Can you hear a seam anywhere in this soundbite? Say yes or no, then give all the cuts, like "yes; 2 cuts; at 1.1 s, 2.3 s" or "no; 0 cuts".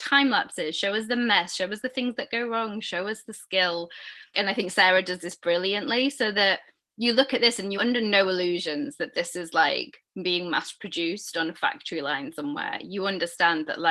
yes; 2 cuts; at 4.3 s, 7.8 s